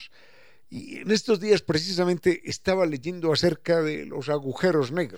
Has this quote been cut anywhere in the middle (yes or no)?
no